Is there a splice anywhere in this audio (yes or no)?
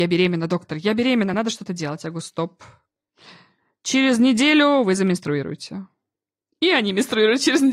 no